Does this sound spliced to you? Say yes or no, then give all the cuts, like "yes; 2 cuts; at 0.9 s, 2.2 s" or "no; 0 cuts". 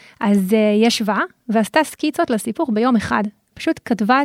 no; 0 cuts